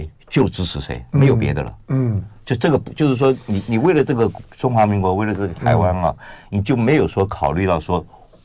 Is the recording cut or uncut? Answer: cut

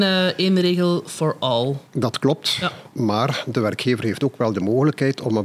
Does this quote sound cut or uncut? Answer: cut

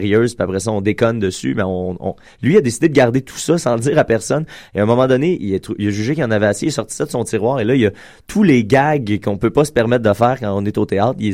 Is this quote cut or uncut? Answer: uncut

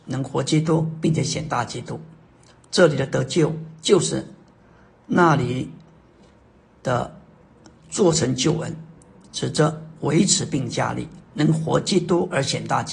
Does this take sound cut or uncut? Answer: uncut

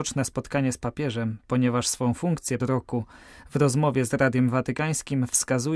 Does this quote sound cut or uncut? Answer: cut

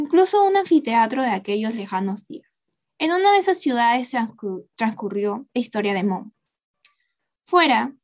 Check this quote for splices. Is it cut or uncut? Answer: cut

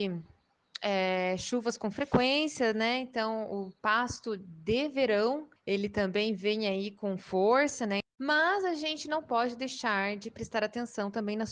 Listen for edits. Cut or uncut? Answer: uncut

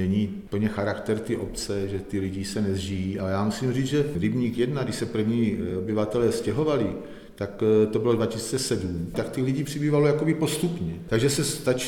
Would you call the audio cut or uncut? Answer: uncut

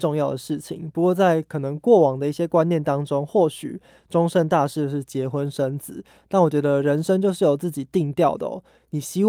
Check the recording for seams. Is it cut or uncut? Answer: uncut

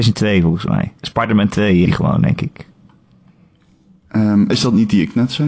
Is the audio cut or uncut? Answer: cut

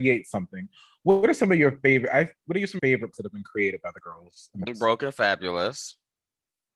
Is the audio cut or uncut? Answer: cut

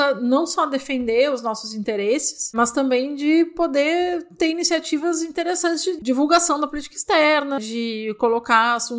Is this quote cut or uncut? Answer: cut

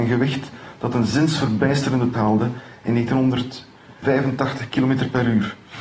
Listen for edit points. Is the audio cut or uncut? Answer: cut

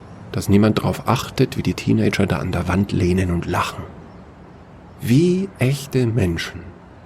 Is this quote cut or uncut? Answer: cut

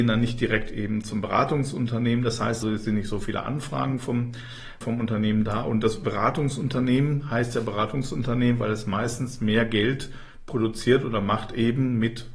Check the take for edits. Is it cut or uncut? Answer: cut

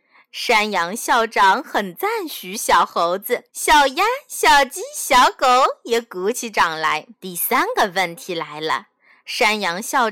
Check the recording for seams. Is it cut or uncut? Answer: cut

